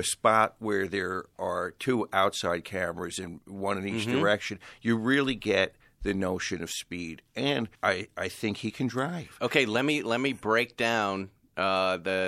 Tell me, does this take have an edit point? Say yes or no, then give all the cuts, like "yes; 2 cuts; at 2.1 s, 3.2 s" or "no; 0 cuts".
yes; 1 cut; at 7.8 s